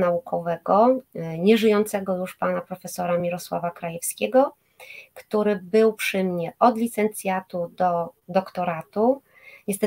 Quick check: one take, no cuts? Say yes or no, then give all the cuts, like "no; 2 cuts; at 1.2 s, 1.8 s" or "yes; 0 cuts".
yes; 0 cuts